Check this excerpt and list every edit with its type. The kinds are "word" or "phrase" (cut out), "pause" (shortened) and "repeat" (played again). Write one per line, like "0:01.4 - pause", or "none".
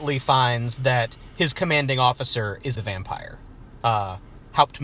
0:02.8 - word